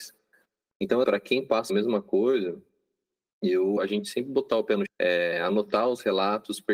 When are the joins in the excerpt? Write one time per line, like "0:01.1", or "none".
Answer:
0:01.0
0:01.7
0:03.8
0:04.9